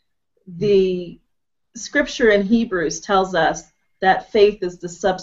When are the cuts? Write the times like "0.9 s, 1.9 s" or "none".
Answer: none